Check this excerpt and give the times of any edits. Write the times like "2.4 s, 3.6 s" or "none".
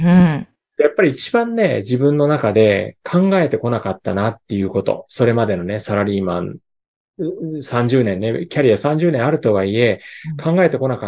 none